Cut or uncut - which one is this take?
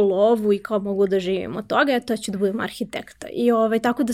uncut